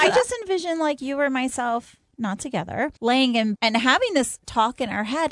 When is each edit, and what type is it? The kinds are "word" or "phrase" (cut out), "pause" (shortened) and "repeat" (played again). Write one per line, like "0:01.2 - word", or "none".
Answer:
0:03.0 - pause
0:03.6 - word